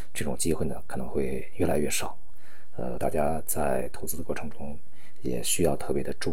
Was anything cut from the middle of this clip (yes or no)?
yes